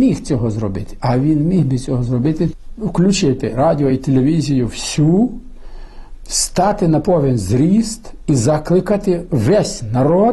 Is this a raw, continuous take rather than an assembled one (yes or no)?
yes